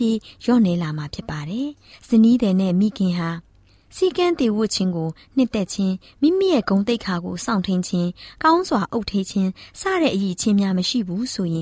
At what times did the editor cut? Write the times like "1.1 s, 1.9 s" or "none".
none